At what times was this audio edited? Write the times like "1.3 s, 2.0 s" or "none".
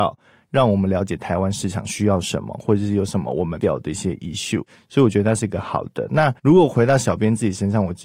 3.6 s, 6.4 s